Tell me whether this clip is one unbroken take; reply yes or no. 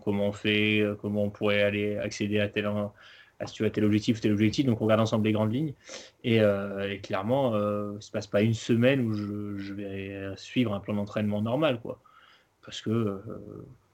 yes